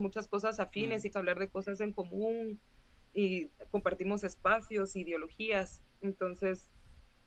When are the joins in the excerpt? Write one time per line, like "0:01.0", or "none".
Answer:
0:01.1